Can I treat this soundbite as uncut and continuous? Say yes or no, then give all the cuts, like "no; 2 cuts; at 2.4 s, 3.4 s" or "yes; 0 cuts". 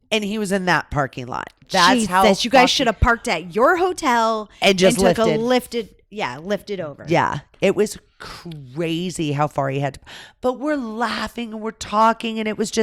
yes; 0 cuts